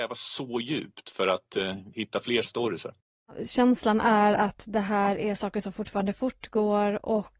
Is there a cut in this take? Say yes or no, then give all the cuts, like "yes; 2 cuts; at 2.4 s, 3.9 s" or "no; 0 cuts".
yes; 2 cuts; at 1.9 s, 2.4 s